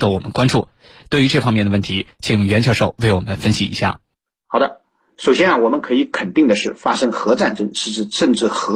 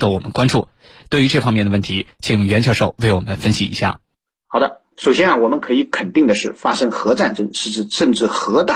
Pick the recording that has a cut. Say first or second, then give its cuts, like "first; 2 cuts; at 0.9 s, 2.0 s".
second; 1 cut; at 4.9 s